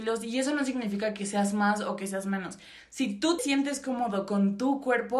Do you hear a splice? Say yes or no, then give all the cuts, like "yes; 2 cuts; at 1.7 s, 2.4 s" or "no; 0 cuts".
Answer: yes; 1 cut; at 3.4 s